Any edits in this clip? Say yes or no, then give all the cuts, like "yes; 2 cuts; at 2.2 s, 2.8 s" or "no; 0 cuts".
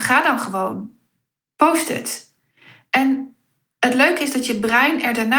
no; 0 cuts